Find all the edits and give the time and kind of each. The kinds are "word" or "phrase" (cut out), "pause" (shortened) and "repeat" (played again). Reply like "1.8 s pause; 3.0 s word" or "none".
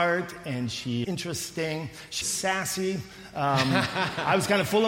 1.0 s word; 2.2 s word